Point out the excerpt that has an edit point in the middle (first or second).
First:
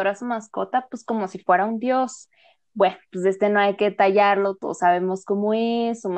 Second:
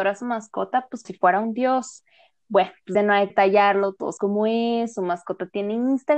second